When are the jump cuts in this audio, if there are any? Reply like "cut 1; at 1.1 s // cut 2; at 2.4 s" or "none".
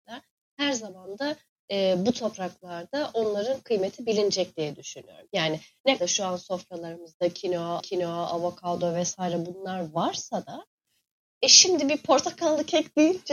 cut 1; at 6.0 s // cut 2; at 7.8 s